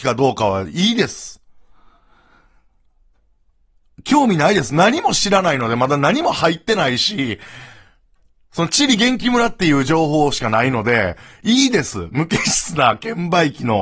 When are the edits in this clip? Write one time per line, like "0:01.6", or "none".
none